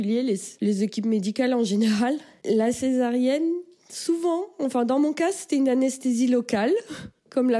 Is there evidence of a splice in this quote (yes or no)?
no